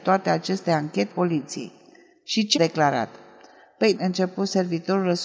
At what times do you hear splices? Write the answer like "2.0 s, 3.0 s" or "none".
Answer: 1.1 s, 2.5 s, 3.9 s